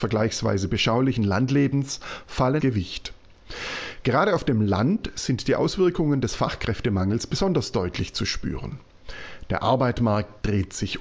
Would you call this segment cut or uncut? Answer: cut